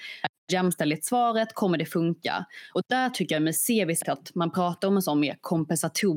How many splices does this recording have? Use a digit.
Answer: 1